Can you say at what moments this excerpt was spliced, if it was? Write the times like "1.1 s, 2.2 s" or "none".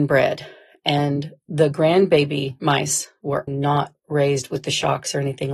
3.5 s